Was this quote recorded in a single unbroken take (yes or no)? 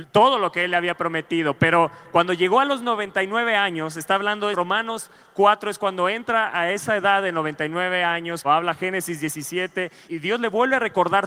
no